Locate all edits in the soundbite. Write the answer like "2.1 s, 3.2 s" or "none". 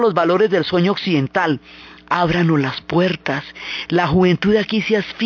none